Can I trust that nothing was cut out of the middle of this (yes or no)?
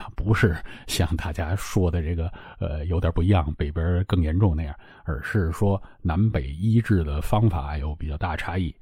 yes